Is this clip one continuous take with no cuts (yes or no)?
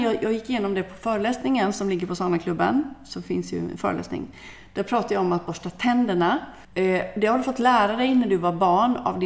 no